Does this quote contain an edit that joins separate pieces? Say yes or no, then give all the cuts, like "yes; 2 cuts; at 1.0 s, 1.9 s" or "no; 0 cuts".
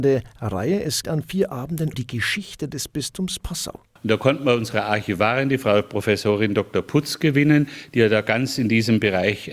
yes; 2 cuts; at 1.0 s, 1.9 s